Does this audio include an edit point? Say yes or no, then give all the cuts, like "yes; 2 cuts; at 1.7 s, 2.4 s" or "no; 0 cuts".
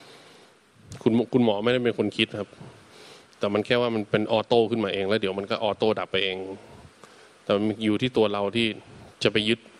no; 0 cuts